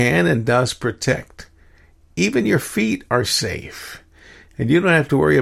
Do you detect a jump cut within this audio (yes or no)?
no